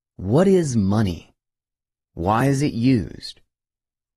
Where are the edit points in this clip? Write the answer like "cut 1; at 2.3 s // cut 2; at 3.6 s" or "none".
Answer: none